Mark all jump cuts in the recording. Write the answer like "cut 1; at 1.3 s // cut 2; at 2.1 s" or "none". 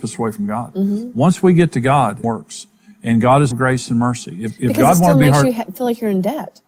cut 1; at 2.2 s // cut 2; at 3.5 s